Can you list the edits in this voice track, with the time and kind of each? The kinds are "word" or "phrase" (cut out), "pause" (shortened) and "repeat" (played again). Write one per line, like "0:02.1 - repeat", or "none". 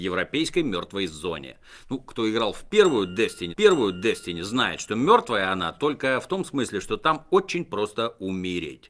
0:03.5 - repeat